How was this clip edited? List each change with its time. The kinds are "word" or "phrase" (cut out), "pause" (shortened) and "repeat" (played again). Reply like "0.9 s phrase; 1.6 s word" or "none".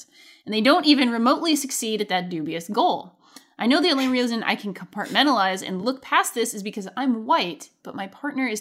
none